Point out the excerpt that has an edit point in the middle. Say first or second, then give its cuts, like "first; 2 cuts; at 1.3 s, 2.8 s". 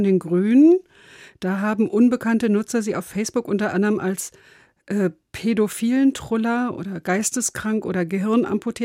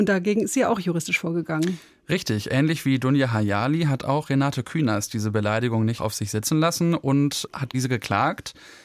second; 2 cuts; at 6.0 s, 7.7 s